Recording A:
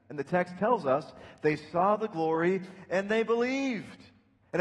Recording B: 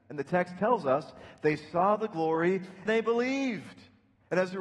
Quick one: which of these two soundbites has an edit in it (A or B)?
B